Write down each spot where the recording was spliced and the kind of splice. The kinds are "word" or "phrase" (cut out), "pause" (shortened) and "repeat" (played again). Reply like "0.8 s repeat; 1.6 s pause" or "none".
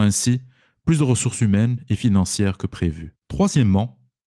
3.2 s pause